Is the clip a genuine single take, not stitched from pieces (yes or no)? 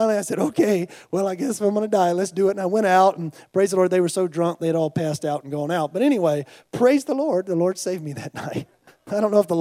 yes